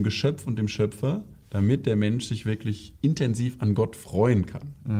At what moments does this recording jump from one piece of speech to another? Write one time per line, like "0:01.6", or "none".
none